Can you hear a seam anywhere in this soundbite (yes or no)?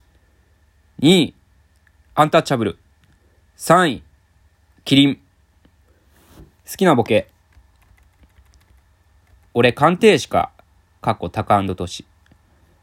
no